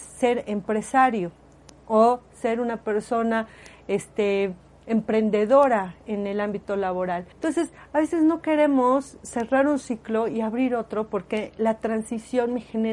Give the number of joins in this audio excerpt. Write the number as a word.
one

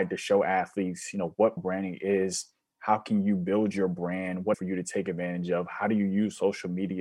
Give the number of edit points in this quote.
two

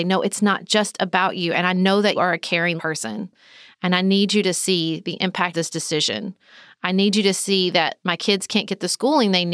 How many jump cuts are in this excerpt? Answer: three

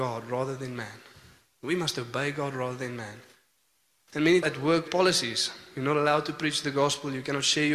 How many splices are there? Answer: two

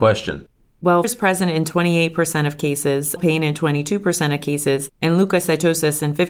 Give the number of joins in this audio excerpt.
two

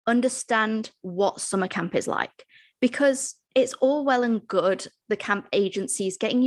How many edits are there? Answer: one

